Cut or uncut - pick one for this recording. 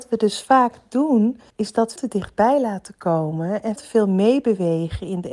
cut